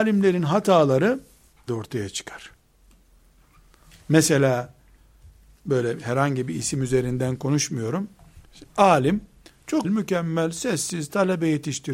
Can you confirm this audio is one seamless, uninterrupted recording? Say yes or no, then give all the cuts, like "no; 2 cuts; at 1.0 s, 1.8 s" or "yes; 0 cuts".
no; 2 cuts; at 1.7 s, 9.8 s